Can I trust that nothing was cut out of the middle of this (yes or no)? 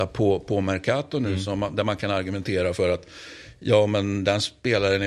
yes